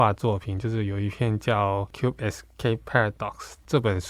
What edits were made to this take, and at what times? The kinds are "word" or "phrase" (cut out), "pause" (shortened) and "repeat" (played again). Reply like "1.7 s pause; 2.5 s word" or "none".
none

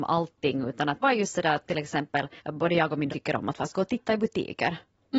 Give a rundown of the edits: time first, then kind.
1.0 s phrase; 1.6 s word; 2.4 s pause; 3.1 s word

